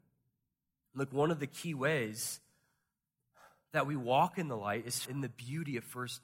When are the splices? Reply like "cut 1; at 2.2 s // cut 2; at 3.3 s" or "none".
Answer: cut 1; at 5.1 s